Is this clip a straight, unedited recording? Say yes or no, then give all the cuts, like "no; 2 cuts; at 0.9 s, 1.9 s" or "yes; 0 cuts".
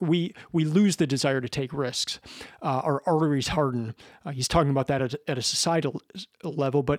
yes; 0 cuts